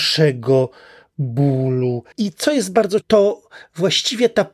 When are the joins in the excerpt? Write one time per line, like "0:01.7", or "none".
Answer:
0:02.1
0:03.0